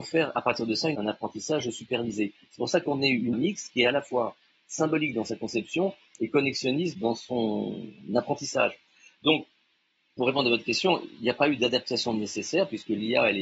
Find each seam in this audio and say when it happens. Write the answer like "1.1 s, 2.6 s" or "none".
3.3 s